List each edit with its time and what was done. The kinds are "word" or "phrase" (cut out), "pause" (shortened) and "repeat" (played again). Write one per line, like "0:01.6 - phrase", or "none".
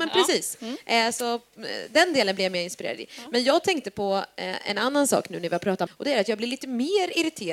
0:05.9 - word